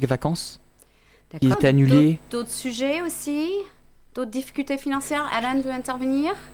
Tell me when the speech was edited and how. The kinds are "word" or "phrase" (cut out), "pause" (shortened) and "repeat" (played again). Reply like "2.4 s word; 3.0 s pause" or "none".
1.5 s word